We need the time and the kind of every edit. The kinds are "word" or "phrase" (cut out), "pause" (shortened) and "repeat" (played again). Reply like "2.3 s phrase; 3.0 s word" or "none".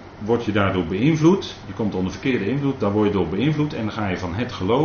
none